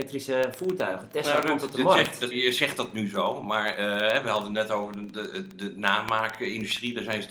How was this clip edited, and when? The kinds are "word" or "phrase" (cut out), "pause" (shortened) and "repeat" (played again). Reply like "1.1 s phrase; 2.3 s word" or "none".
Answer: 2.3 s word